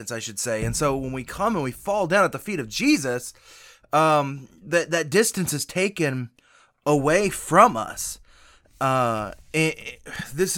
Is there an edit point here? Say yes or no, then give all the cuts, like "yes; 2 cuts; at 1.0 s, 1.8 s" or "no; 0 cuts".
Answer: no; 0 cuts